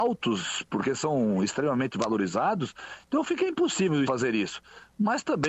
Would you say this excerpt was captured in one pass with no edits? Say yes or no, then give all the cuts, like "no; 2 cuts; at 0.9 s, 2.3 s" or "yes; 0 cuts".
no; 1 cut; at 4.1 s